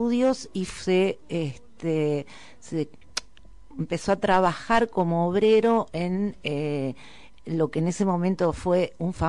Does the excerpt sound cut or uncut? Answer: uncut